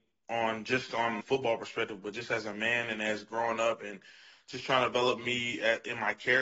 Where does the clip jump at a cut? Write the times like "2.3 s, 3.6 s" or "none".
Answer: 1.2 s